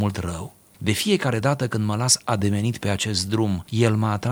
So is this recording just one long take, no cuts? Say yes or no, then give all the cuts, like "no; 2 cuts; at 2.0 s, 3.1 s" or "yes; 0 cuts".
yes; 0 cuts